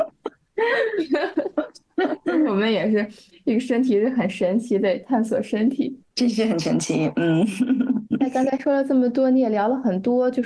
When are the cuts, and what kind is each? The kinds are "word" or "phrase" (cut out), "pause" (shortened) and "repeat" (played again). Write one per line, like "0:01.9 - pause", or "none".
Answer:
0:06.0 - pause